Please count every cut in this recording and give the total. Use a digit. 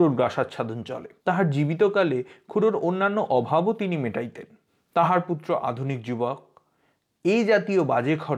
2